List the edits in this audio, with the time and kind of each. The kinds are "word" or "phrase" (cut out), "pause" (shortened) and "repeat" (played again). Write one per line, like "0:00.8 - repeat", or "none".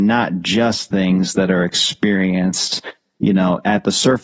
none